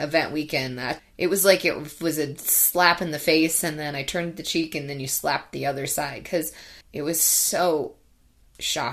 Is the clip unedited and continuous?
no; 2 cuts; at 1.0 s, 6.8 s

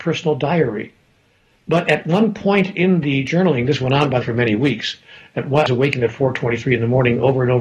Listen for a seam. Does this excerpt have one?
yes; 2 cuts; at 4.2 s, 5.7 s

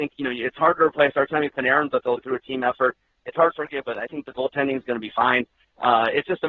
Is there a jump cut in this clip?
yes; 3 cuts; at 2.2 s, 3.5 s, 3.8 s

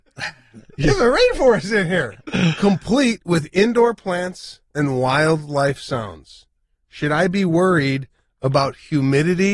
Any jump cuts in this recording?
yes; 1 cut; at 4.7 s

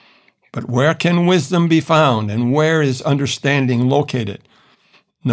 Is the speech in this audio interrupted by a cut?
no; 0 cuts

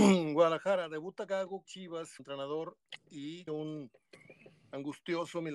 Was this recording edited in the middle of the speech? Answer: yes; 3 cuts; at 1.7 s, 2.2 s, 3.5 s

